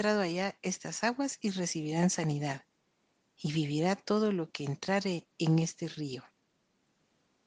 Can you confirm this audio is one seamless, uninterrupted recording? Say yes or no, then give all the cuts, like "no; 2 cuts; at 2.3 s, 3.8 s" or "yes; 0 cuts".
yes; 0 cuts